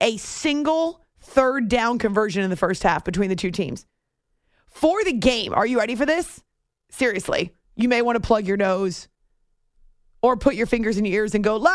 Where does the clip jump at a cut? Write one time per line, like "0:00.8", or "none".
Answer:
none